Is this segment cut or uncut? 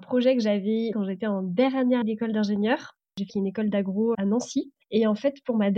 cut